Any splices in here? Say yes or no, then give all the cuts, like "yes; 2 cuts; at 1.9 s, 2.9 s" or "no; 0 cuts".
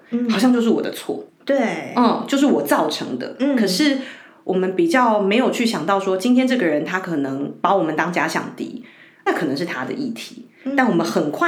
yes; 2 cuts; at 1.3 s, 9.3 s